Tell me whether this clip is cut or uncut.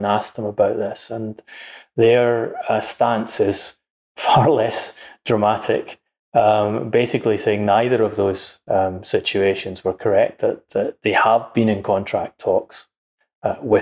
uncut